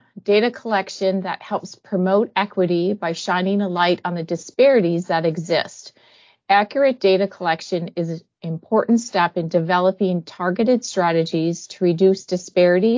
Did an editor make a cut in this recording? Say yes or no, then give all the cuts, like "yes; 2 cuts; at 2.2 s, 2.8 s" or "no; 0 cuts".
no; 0 cuts